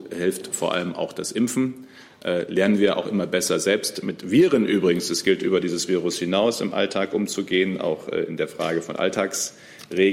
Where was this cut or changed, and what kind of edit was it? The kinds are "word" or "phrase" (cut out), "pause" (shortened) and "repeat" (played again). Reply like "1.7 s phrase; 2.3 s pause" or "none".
none